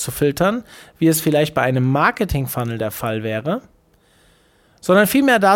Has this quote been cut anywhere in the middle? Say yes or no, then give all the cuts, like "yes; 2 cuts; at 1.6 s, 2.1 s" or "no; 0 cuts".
no; 0 cuts